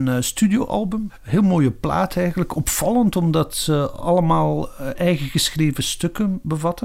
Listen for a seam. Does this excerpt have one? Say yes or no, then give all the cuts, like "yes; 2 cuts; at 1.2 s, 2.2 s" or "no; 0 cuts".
no; 0 cuts